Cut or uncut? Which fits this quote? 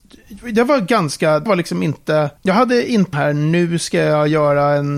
cut